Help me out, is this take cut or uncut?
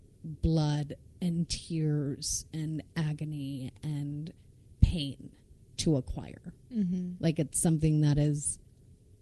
uncut